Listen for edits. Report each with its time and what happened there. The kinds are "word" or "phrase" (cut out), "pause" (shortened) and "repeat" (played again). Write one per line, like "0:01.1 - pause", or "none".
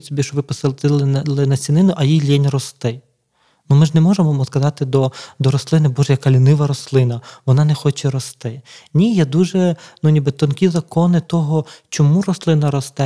none